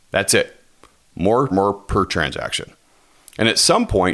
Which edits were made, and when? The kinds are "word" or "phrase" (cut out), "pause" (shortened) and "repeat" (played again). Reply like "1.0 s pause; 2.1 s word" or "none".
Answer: 1.5 s phrase